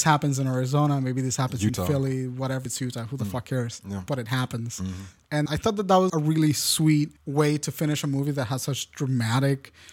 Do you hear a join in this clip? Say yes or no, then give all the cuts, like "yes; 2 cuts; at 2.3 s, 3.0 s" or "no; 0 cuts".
yes; 4 cuts; at 2.7 s, 5.5 s, 6.1 s, 7.2 s